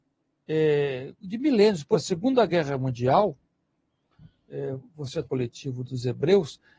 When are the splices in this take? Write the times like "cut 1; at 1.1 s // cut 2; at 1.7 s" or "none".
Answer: cut 1; at 1.2 s // cut 2; at 1.9 s // cut 3; at 5.2 s // cut 4; at 5.9 s